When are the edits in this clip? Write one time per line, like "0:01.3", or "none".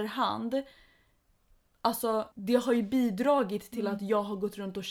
0:02.3